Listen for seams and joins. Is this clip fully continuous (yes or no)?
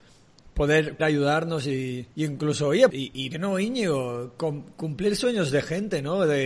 no